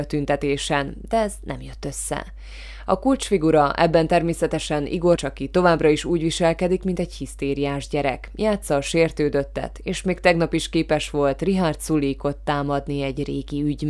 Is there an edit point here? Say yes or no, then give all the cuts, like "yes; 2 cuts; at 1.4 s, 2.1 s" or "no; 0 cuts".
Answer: yes; 1 cut; at 5.2 s